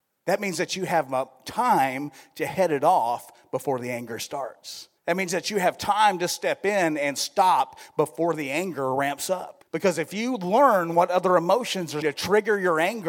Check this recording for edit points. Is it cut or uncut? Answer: cut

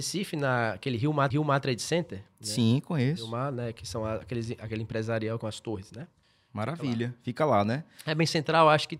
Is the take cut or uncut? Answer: cut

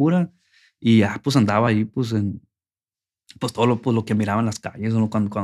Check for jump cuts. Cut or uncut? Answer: uncut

